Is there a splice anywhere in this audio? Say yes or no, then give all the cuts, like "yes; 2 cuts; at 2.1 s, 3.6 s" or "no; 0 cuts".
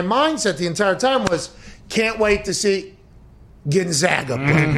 no; 0 cuts